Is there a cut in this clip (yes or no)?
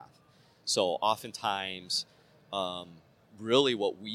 no